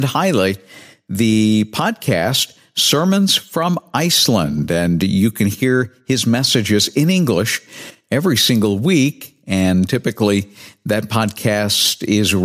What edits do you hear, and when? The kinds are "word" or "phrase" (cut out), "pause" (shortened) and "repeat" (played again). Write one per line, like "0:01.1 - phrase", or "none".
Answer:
none